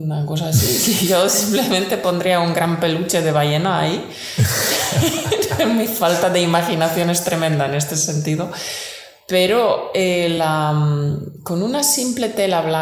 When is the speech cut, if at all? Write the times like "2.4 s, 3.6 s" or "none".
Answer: none